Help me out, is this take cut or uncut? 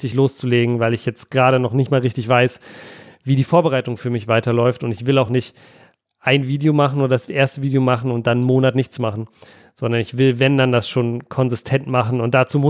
uncut